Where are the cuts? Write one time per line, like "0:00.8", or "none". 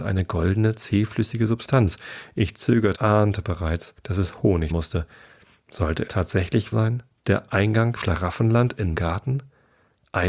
0:02.9
0:04.0
0:04.7
0:06.1
0:06.7
0:08.0
0:08.9